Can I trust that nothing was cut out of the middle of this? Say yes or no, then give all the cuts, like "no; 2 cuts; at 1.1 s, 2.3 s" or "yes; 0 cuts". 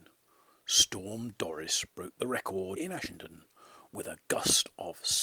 no; 1 cut; at 2.8 s